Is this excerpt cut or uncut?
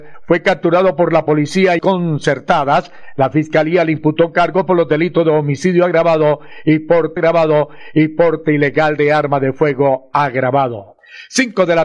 cut